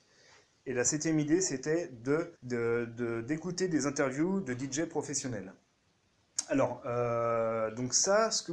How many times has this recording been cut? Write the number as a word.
one